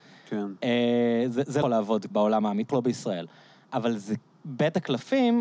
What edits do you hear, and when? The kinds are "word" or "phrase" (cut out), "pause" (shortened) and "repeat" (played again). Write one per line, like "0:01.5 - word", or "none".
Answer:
0:01.6 - word
0:02.1 - word
0:02.7 - word
0:04.2 - word